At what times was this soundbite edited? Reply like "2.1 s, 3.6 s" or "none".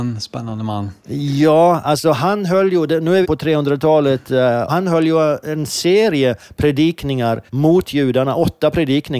1.0 s, 3.2 s, 4.7 s, 7.5 s